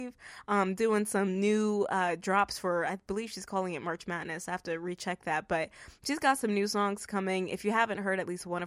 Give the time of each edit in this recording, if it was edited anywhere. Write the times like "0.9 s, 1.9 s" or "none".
none